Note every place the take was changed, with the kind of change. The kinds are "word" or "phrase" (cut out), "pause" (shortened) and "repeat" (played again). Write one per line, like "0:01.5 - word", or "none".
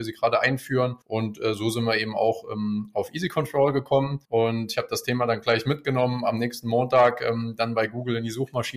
0:01.0 - pause
0:04.2 - pause